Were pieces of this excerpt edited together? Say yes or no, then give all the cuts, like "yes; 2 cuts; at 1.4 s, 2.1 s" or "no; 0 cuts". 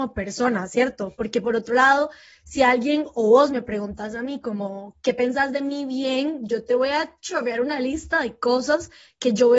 no; 0 cuts